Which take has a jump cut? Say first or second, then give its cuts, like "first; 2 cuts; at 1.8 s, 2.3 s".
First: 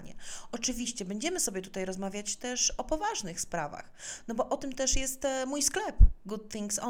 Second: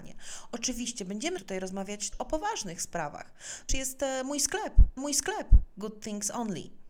second; 4 cuts; at 1.4 s, 2.1 s, 3.7 s, 5.0 s